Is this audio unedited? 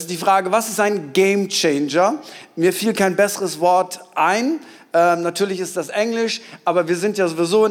yes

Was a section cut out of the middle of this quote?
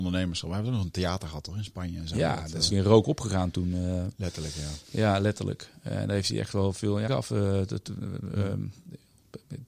yes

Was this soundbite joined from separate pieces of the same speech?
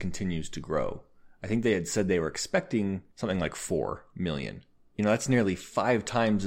no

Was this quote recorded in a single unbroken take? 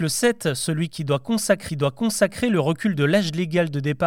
no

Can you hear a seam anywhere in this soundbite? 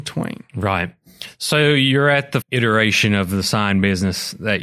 yes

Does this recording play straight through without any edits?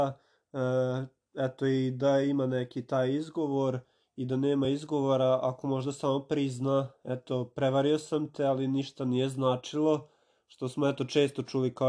yes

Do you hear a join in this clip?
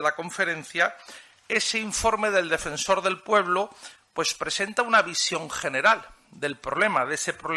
no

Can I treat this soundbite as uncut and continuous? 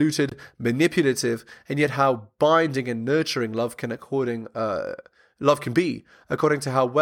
yes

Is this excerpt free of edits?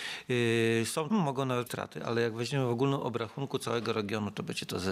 no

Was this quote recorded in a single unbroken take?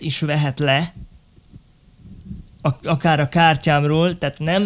yes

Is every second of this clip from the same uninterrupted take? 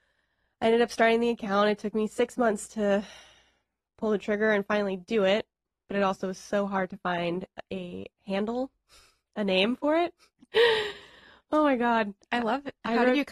yes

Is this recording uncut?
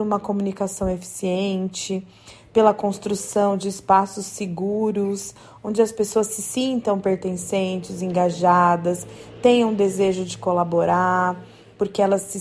yes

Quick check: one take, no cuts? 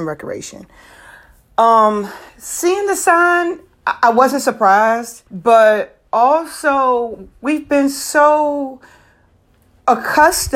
no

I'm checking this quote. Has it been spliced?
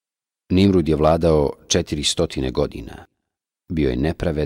no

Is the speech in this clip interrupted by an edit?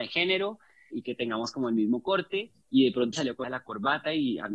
yes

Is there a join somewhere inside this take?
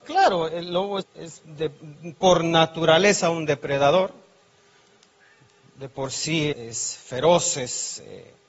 yes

